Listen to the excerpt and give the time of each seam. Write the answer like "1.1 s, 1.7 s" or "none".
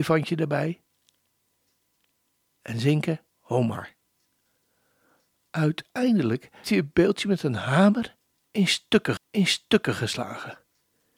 3.3 s, 6.6 s, 9.2 s